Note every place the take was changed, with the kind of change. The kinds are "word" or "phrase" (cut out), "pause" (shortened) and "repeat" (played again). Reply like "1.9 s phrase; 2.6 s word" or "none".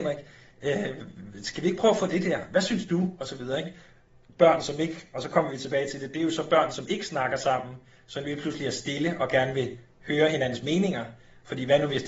none